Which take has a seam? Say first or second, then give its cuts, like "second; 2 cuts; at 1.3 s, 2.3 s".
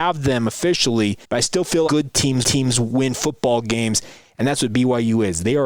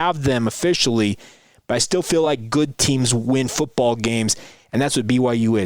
first; 3 cuts; at 1.2 s, 1.9 s, 2.4 s